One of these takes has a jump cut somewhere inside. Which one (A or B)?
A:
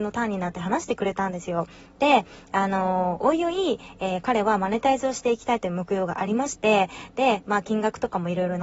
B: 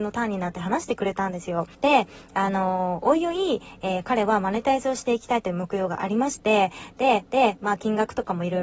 B